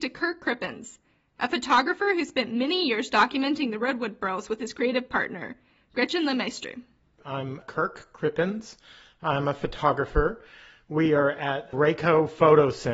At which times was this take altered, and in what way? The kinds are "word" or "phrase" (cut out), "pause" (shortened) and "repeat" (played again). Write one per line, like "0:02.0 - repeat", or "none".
none